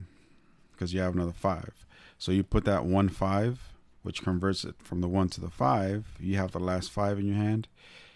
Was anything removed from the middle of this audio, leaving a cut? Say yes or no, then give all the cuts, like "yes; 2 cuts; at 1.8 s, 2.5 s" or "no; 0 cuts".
yes; 1 cut; at 3.9 s